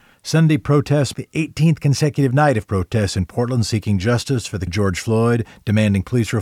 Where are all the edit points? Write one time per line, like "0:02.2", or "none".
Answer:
0:01.1
0:04.7